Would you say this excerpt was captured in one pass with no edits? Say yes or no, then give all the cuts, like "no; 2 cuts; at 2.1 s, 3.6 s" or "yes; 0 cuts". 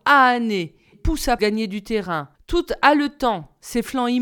no; 3 cuts; at 0.9 s, 1.4 s, 2.3 s